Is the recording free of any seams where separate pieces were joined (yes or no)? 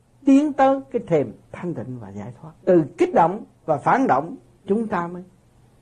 no